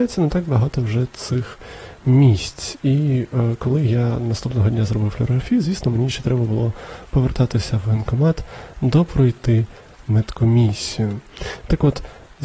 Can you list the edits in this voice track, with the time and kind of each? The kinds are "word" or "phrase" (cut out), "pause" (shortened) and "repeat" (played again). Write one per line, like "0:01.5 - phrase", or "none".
none